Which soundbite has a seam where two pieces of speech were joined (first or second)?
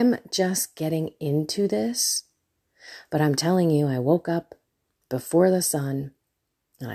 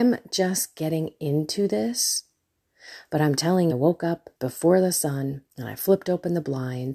second